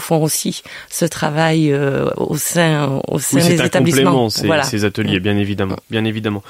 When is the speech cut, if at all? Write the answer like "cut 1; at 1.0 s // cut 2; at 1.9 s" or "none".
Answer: none